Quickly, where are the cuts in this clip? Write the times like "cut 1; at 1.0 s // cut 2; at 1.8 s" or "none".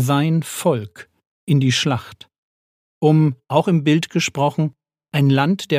cut 1; at 3.4 s